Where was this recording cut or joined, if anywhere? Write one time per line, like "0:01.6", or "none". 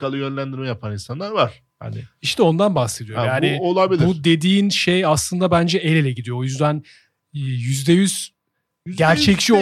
none